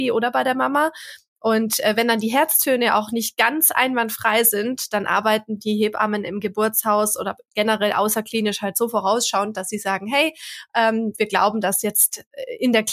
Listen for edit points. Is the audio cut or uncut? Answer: uncut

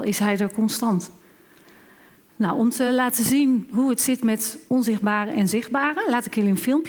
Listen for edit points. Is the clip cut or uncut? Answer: uncut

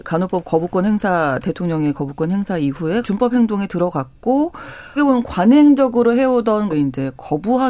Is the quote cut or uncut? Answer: cut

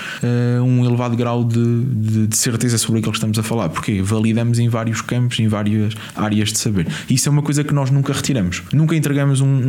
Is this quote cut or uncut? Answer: uncut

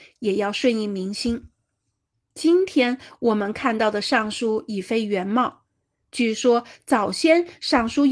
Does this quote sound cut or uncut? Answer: uncut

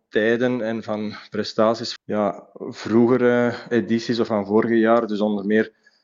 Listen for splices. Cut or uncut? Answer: cut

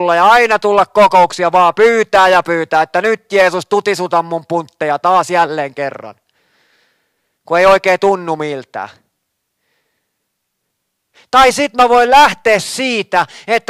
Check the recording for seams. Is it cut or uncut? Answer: uncut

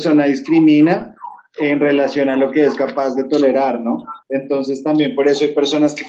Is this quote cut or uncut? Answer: cut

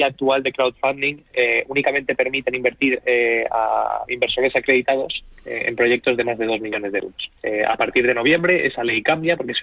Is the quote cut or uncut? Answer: uncut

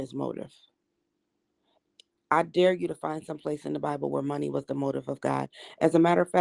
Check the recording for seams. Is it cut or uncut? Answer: uncut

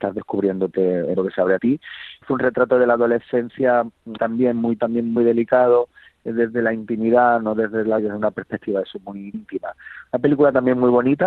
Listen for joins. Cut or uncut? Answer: cut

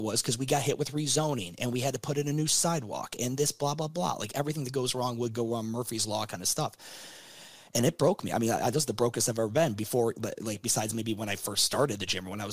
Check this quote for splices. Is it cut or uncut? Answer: uncut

